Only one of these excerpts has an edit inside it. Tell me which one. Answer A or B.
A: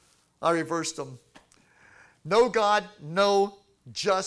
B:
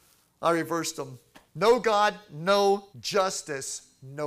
B